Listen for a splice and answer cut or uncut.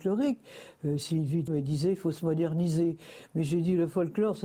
cut